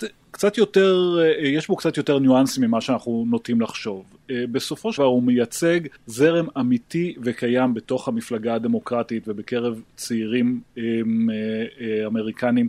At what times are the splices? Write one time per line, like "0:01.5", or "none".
0:05.0
0:06.0